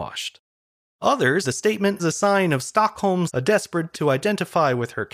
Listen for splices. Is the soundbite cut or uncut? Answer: cut